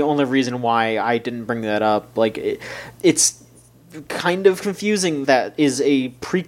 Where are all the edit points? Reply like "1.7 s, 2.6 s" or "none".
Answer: 2.9 s, 5.2 s